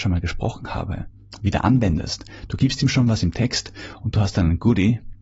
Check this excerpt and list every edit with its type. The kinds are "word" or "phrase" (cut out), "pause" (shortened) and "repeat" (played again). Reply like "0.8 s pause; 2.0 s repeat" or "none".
none